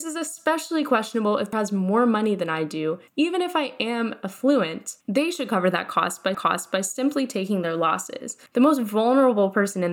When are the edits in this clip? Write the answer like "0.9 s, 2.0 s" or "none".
1.5 s, 5.0 s, 6.3 s, 8.5 s